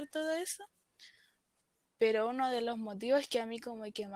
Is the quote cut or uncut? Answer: uncut